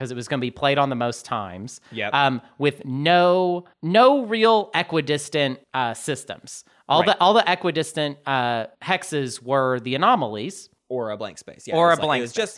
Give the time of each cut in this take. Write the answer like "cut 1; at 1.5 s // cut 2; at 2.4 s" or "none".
cut 1; at 3.7 s // cut 2; at 5.6 s // cut 3; at 8.7 s // cut 4; at 10.8 s